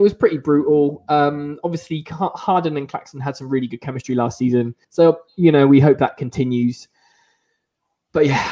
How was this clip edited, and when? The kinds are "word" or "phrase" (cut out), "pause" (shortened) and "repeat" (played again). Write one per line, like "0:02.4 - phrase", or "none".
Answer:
0:04.8 - pause